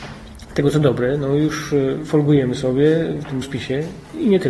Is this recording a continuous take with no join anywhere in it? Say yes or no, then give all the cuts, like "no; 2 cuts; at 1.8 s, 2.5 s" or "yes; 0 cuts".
no; 1 cut; at 3.4 s